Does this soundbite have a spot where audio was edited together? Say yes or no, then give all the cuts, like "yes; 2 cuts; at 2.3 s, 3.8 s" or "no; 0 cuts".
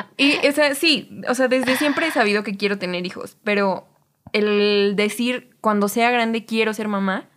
no; 0 cuts